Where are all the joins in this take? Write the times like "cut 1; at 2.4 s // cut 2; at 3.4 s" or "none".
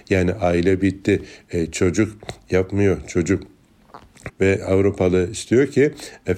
cut 1; at 4.3 s